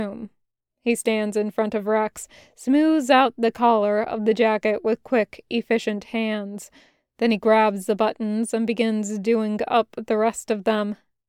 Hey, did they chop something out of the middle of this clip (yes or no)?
no